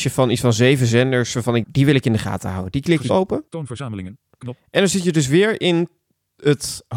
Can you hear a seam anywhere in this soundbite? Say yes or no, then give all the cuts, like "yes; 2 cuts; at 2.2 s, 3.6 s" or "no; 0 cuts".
yes; 3 cuts; at 1.6 s, 3.1 s, 3.5 s